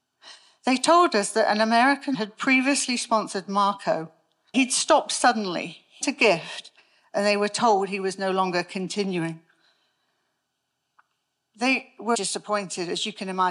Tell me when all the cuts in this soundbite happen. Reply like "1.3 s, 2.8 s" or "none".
2.1 s, 4.5 s, 6.0 s, 12.1 s